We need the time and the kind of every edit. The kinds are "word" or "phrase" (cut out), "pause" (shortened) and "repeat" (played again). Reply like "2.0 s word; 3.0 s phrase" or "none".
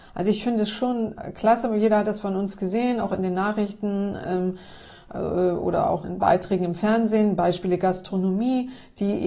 6.0 s word